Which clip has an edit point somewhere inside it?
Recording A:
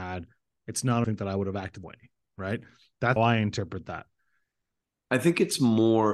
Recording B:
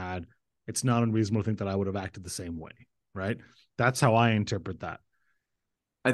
A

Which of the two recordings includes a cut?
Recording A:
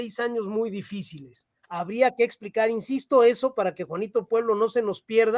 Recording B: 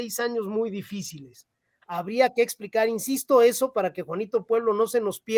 A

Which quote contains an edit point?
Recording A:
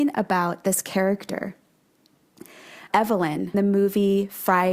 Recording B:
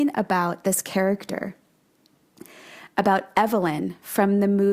A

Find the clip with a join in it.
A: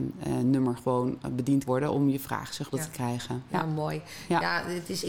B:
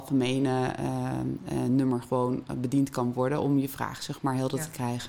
A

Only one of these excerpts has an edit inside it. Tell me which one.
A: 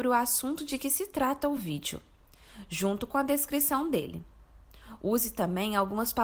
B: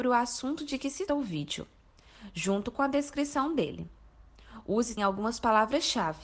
B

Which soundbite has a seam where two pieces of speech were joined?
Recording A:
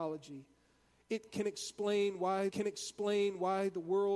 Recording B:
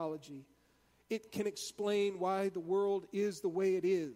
A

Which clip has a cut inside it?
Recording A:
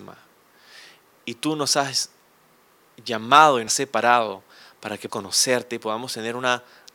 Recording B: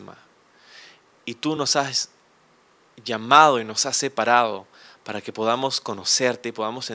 A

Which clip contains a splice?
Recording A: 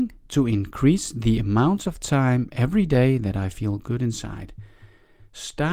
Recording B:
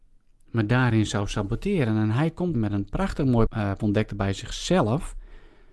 B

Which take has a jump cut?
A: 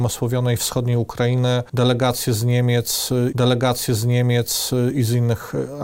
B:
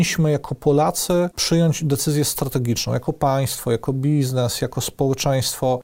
A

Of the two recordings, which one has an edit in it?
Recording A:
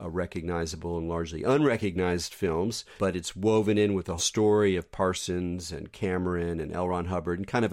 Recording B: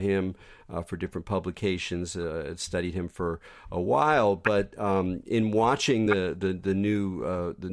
A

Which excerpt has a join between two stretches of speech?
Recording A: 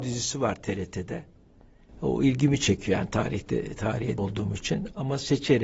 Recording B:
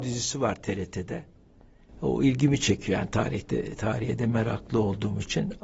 A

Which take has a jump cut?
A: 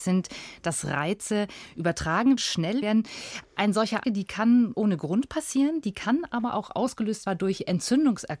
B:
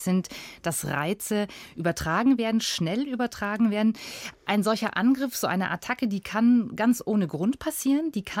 A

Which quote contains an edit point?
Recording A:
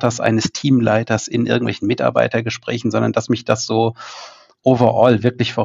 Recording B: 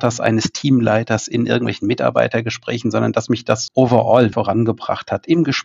B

